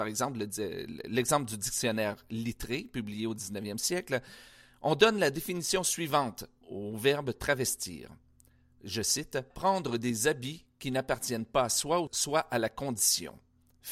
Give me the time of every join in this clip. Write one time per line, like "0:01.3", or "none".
0:06.6
0:09.5
0:12.1